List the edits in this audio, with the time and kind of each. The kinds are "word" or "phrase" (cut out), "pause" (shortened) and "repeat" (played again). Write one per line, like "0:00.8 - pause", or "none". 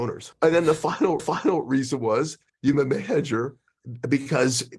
0:01.2 - repeat
0:02.7 - word